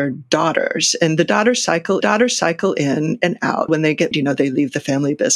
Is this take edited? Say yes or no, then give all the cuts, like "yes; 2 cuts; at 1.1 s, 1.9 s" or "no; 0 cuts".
yes; 3 cuts; at 2.0 s, 3.7 s, 4.1 s